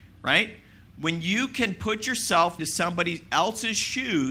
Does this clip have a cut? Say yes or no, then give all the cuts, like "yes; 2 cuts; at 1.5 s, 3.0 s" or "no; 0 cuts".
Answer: yes; 1 cut; at 2.6 s